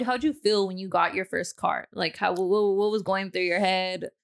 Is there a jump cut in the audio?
no; 0 cuts

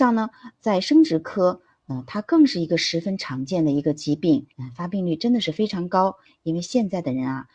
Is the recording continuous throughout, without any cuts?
no; 1 cut; at 4.5 s

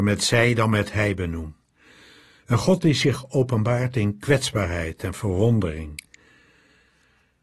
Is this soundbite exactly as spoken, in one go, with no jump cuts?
yes; 0 cuts

